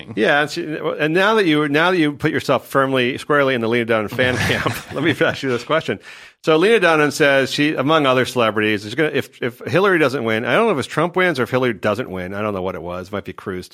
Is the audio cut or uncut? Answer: uncut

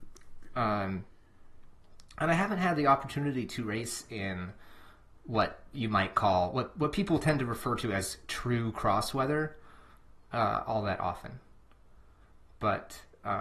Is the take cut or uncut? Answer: uncut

